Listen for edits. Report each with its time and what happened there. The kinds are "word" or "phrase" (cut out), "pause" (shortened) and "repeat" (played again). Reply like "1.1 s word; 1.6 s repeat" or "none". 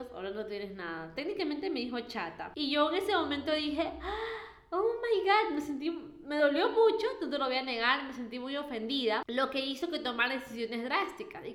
none